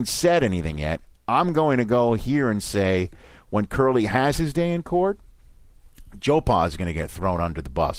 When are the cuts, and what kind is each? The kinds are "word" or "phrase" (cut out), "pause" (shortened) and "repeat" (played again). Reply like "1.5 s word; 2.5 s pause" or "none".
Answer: none

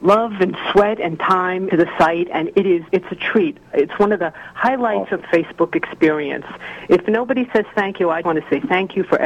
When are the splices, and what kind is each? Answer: 1.7 s word; 2.9 s word; 5.2 s word; 8.2 s word

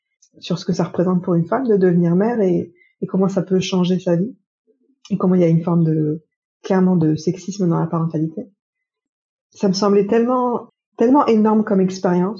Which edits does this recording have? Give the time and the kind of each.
none

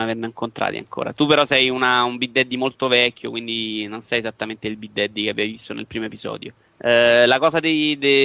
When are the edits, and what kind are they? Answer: 6.6 s pause

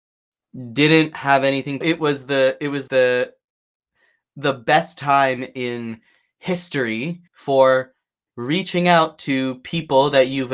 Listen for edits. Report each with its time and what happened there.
1.8 s phrase; 2.9 s word; 7.3 s pause

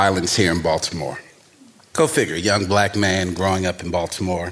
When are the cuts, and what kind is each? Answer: none

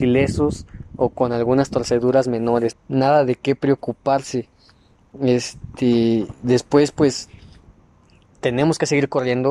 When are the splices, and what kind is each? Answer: 2.7 s word

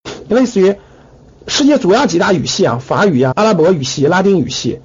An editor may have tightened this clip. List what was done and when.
3.3 s word

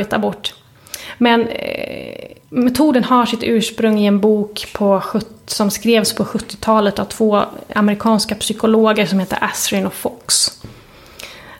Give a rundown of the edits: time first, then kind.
2.4 s pause

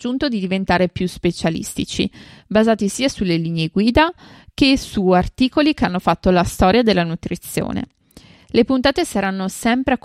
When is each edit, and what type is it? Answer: none

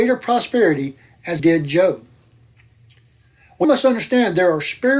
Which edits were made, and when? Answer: 1.4 s word; 3.6 s word

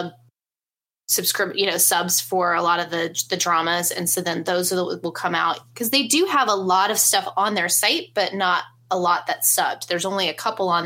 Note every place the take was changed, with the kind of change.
none

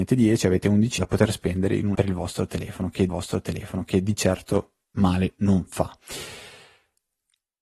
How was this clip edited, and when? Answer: 1.0 s word; 1.9 s word; 3.1 s repeat; 4.8 s pause

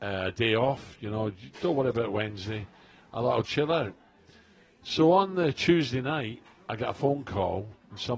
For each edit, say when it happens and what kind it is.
3.4 s word

